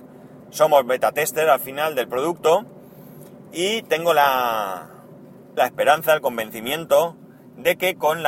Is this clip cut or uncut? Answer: cut